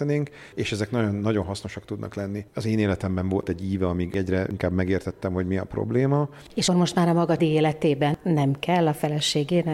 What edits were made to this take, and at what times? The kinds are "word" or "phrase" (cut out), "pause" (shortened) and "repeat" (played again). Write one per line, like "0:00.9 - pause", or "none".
0:06.7 - word
0:07.4 - word